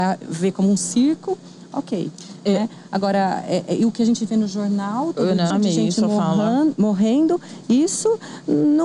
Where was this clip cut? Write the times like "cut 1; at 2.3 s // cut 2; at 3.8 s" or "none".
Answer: cut 1; at 5.5 s

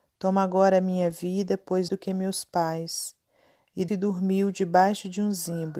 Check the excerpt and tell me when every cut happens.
cut 1; at 1.9 s // cut 2; at 3.9 s

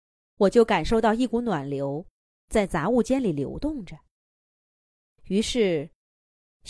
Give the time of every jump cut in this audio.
none

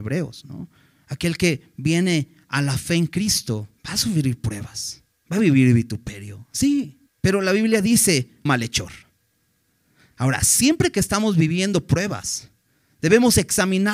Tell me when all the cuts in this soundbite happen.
cut 1; at 3.8 s // cut 2; at 5.1 s // cut 3; at 7.1 s // cut 4; at 8.5 s

